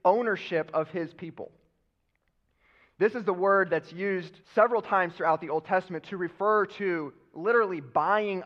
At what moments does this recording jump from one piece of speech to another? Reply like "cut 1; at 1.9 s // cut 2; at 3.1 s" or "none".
cut 1; at 4.4 s